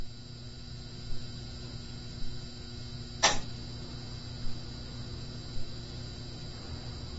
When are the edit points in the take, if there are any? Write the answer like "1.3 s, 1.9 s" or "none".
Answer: none